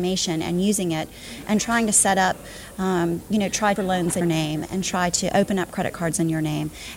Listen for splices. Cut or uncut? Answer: cut